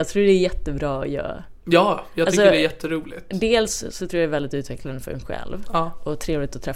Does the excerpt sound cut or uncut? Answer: uncut